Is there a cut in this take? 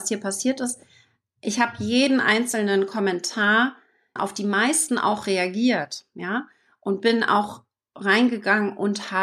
yes; 1 cut; at 4.2 s

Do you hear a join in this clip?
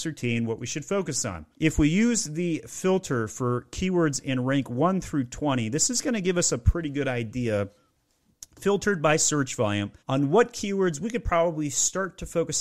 yes; 2 cuts; at 1.5 s, 10.0 s

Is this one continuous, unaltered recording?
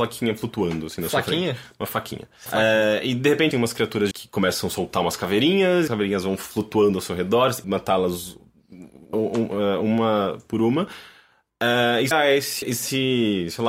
no; 8 cuts; at 2.5 s, 3.5 s, 4.1 s, 5.9 s, 7.6 s, 9.1 s, 12.1 s, 12.6 s

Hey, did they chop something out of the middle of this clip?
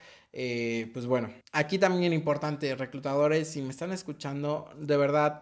yes; 1 cut; at 1.4 s

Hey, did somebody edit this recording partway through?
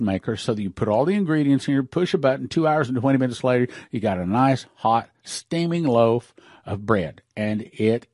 no; 0 cuts

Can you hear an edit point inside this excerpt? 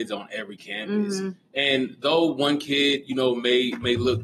no; 0 cuts

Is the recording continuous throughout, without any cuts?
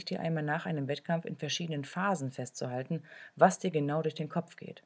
yes; 0 cuts

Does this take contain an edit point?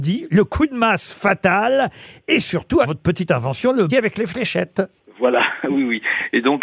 yes; 2 cuts; at 2.8 s, 3.9 s

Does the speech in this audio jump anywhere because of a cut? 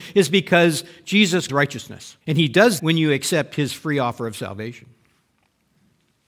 yes; 3 cuts; at 1.5 s, 2.2 s, 2.8 s

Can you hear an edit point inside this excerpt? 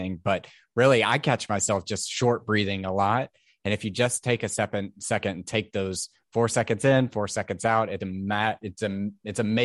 no; 0 cuts

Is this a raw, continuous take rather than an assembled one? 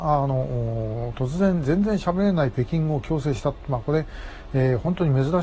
yes; 0 cuts

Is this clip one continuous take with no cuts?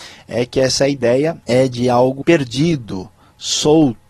no; 2 cuts; at 1.4 s, 2.2 s

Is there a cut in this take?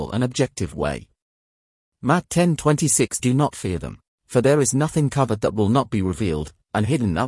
yes; 2 cuts; at 3.2 s, 4.1 s

